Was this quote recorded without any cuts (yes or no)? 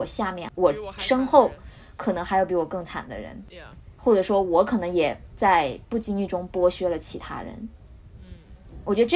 yes